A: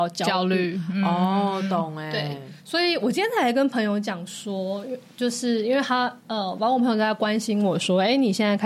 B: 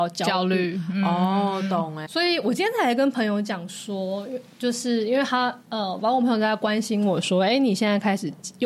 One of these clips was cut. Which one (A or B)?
B